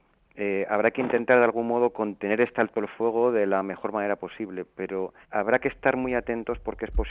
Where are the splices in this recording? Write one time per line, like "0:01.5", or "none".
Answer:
0:05.2